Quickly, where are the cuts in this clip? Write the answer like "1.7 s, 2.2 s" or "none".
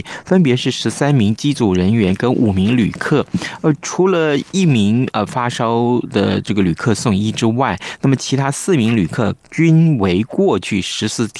9.4 s